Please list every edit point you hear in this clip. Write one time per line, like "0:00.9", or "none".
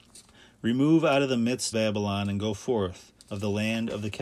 0:01.7
0:03.2